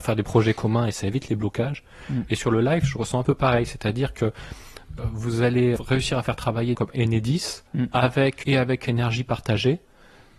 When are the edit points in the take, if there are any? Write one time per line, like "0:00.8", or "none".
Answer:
0:05.8
0:06.7
0:07.7
0:08.4